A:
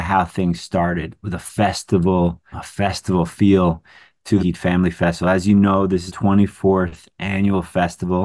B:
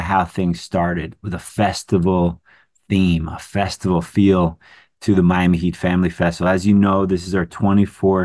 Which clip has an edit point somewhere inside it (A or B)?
A